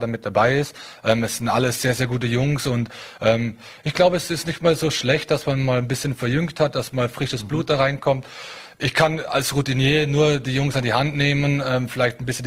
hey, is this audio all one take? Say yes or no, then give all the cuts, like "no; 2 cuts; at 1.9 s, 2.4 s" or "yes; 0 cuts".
yes; 0 cuts